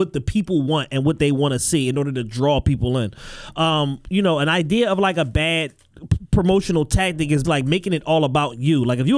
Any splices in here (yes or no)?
yes